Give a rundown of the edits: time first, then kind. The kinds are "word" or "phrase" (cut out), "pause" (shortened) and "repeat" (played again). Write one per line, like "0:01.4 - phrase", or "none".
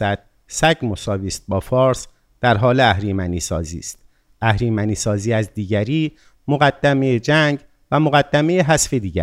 none